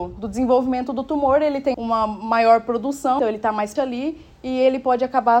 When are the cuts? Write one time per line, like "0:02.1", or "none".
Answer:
0:01.7
0:03.2
0:03.8